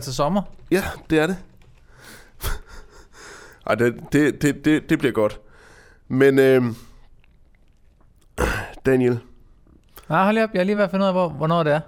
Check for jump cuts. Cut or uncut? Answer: uncut